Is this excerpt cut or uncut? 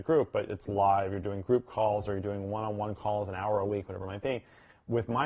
uncut